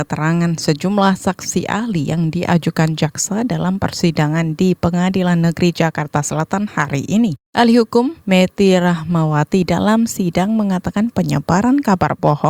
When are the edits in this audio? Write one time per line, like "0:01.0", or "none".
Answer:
none